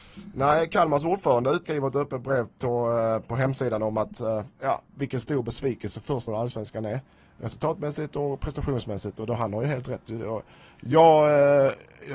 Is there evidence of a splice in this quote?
yes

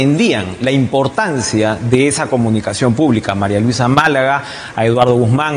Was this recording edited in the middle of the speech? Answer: no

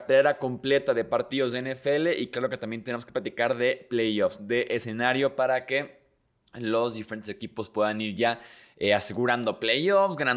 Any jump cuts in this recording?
no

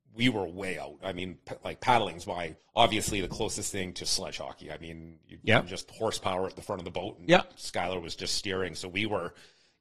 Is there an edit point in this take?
yes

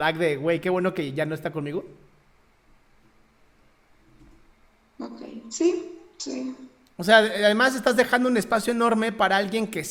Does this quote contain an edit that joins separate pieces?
no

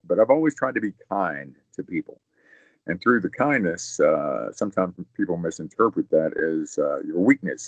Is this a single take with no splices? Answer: yes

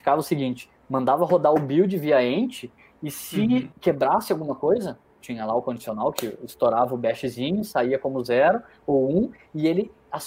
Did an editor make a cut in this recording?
yes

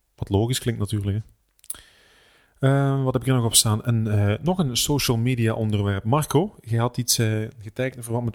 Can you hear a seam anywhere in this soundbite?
no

